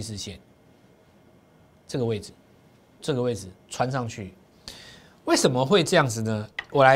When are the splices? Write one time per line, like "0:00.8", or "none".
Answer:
0:03.0